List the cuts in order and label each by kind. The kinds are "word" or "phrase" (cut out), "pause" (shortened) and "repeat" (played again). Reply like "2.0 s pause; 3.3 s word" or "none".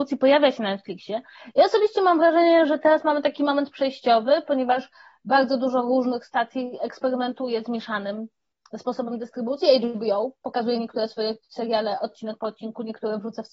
none